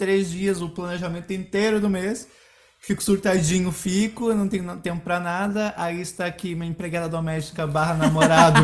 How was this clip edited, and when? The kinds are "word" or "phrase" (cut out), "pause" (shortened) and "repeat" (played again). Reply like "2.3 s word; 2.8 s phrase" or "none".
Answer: none